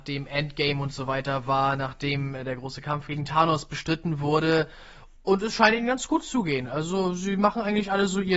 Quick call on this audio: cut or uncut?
uncut